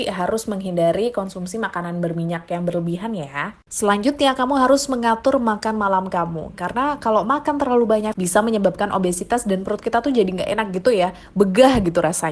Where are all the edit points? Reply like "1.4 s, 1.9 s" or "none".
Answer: 8.1 s

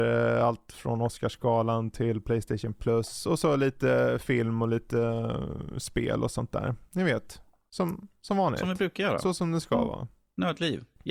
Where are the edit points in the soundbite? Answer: none

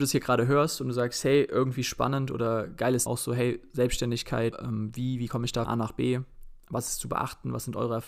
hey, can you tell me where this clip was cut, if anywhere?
3.1 s, 4.5 s, 5.6 s

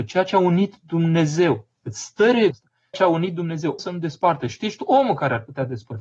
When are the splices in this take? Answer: 2.5 s, 2.9 s, 3.8 s

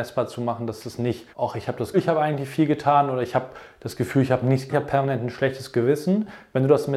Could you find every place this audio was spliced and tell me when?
1.3 s, 1.9 s, 4.7 s

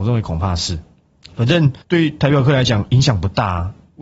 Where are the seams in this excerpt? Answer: 1.8 s

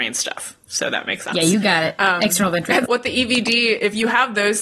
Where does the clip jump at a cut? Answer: 2.9 s

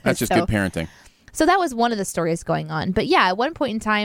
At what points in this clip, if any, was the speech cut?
none

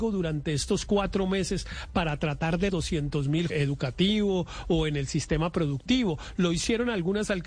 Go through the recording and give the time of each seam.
2.7 s, 3.5 s

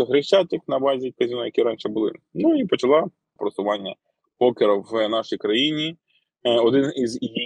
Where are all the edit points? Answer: 1.1 s, 3.4 s

